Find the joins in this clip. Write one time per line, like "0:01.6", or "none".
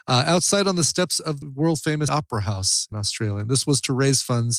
0:01.4
0:02.1
0:02.9